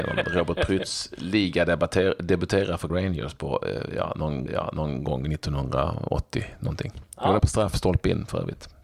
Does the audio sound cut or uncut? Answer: cut